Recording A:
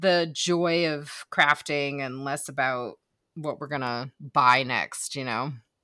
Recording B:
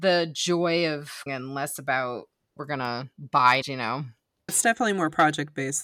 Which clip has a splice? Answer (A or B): B